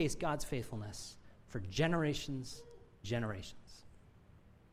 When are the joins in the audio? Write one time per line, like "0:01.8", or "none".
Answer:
0:03.0